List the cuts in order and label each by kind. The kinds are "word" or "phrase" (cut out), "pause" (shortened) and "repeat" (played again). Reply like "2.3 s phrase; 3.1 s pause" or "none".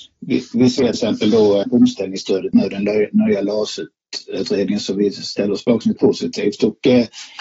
0.9 s word; 1.6 s word; 5.9 s word